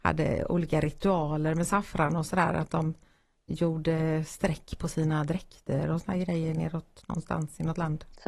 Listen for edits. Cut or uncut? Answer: uncut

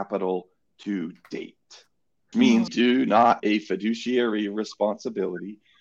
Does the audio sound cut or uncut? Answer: cut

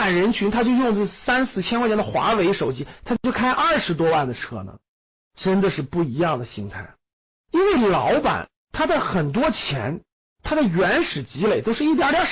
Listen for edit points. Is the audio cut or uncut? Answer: uncut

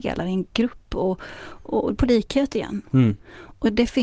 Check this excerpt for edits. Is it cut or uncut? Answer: cut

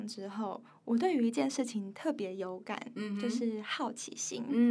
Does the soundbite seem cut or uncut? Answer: uncut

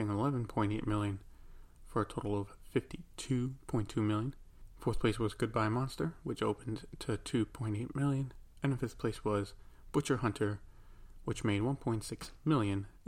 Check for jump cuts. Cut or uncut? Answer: uncut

